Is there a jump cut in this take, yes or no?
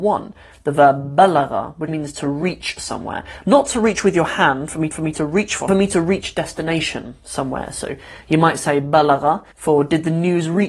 yes